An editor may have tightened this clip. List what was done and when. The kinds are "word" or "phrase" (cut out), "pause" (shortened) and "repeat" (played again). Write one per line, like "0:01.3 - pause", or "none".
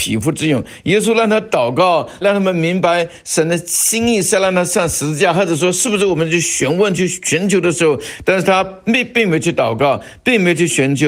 0:02.2 - phrase